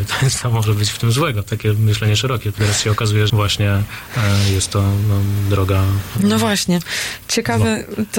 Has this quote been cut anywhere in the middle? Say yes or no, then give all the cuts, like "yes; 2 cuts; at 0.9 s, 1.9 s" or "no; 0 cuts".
yes; 2 cuts; at 1.5 s, 3.3 s